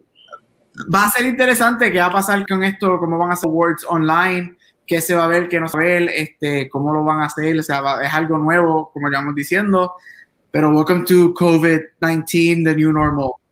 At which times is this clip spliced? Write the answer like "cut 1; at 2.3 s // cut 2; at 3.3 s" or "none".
cut 1; at 2.5 s // cut 2; at 3.4 s // cut 3; at 5.7 s